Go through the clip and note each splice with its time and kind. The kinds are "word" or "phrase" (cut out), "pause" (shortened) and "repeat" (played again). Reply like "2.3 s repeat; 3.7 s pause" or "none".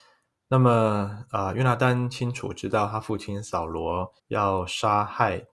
4.2 s pause

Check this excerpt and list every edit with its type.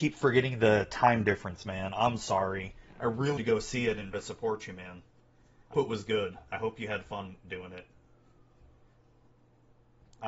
3.4 s word; 4.1 s word; 5.7 s word

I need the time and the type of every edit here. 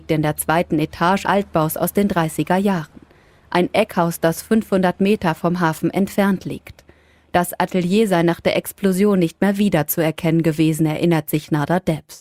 1.2 s word

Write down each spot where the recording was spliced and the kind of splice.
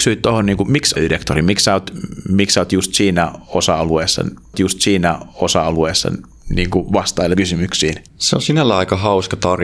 1.0 s phrase; 4.5 s repeat; 7.3 s word; 8.1 s pause

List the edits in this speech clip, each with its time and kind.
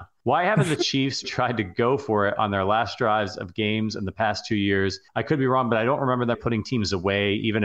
1.2 s word; 5.1 s pause; 6.3 s word

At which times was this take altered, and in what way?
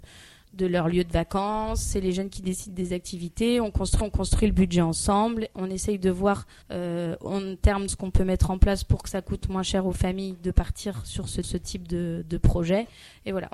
4.0 s repeat; 6.6 s pause; 7.9 s word; 11.4 s repeat

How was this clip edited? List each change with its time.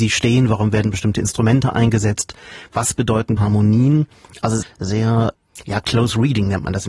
3.4 s word; 4.6 s phrase

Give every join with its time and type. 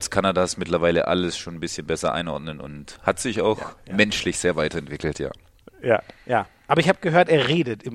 none

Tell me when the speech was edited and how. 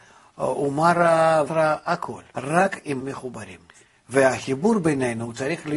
1.5 s word; 2.3 s pause; 3.0 s word; 3.7 s pause

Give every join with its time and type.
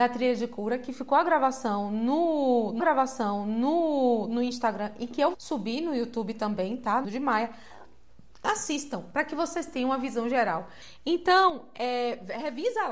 2.8 s repeat; 5.3 s word; 7.0 s phrase

